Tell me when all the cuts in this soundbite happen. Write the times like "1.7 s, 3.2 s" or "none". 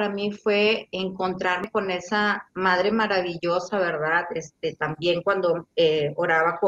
none